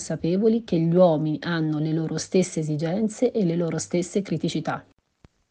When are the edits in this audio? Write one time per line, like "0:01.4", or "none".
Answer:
none